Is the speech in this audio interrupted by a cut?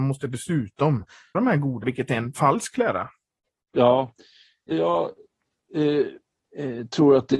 yes; 3 cuts; at 1.3 s, 1.8 s, 4.7 s

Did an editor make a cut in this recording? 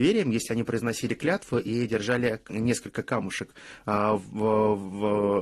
no; 0 cuts

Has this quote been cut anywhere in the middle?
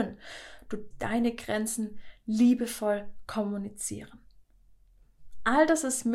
yes; 1 cut; at 0.9 s

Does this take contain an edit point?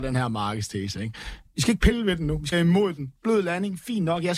yes; 1 cut; at 2.5 s

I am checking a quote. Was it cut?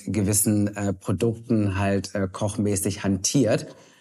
no; 0 cuts

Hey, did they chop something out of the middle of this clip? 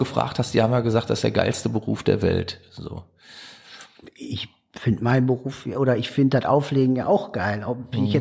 no; 0 cuts

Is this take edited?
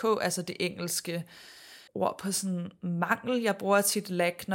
yes; 1 cut; at 1.9 s

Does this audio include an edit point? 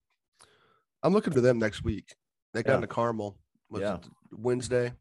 yes; 2 cuts; at 1.3 s, 2.7 s

